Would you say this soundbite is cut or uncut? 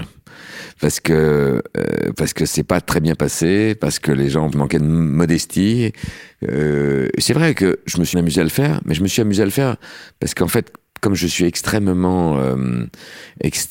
cut